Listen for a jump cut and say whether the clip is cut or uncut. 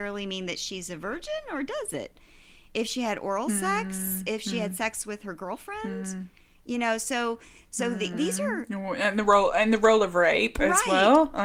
uncut